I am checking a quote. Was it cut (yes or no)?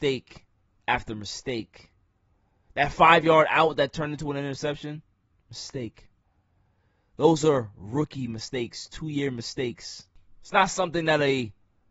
no